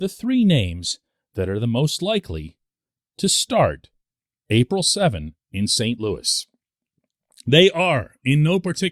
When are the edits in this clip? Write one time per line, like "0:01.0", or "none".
none